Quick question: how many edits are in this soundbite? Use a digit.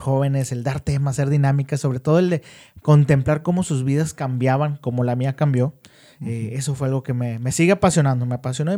0